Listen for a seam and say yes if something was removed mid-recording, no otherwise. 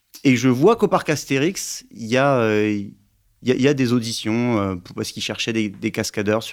no